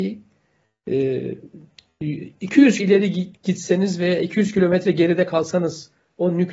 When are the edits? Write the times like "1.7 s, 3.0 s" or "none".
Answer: 2.8 s